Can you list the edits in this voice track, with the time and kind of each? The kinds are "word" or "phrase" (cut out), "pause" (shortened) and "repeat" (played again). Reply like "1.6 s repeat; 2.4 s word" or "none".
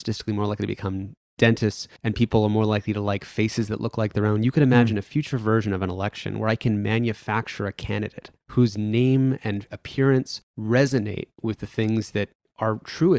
2.0 s pause; 8.4 s pause; 10.5 s pause